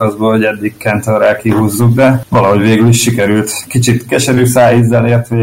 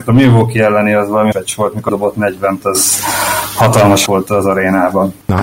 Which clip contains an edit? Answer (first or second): second